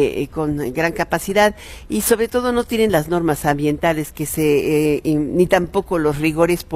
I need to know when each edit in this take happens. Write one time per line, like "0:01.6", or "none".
none